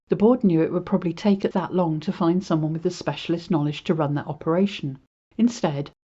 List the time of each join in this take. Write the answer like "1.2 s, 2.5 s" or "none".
1.5 s